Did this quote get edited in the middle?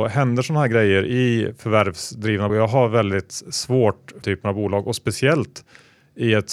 yes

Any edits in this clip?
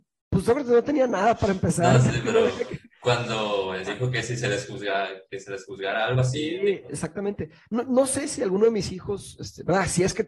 yes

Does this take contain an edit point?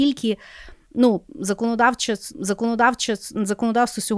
yes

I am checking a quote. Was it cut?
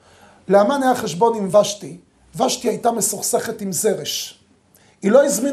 no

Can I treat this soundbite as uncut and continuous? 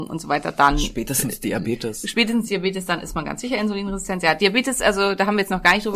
yes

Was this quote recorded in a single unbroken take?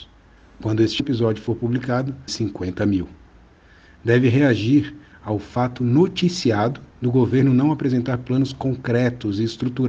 no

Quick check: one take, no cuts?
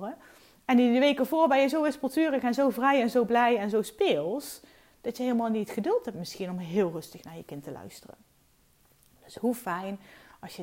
yes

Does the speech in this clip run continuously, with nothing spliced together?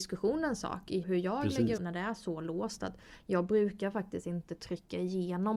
no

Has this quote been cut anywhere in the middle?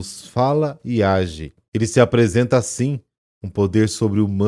no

